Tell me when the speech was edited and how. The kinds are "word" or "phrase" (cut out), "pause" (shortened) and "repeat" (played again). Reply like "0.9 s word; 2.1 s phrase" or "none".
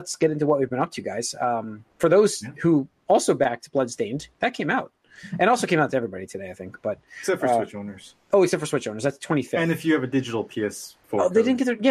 1.9 s pause; 11.0 s pause